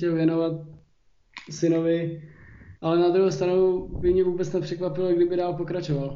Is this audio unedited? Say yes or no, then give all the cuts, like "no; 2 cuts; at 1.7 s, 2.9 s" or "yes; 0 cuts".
no; 1 cut; at 2.8 s